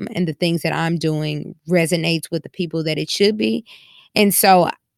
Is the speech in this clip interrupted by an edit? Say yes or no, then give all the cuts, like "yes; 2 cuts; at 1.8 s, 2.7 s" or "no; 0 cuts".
no; 0 cuts